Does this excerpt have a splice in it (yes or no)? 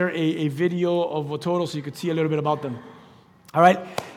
no